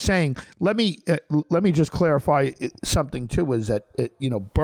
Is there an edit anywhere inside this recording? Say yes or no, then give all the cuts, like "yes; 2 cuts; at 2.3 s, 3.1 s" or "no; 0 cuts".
no; 0 cuts